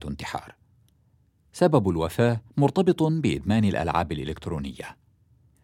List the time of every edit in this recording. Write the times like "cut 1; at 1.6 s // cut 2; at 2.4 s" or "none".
cut 1; at 2.5 s